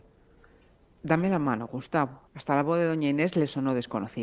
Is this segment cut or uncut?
uncut